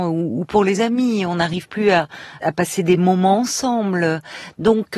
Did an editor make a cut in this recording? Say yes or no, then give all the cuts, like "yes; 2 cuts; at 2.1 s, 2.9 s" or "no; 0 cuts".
yes; 1 cut; at 2.4 s